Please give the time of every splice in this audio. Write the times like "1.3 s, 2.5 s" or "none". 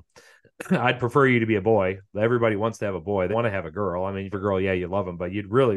3.3 s, 4.3 s